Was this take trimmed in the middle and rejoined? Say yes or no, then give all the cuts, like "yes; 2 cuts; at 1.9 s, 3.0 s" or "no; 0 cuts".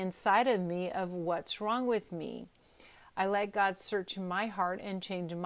no; 0 cuts